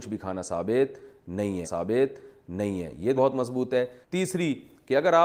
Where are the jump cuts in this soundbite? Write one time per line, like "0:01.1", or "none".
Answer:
0:01.6
0:03.2
0:04.0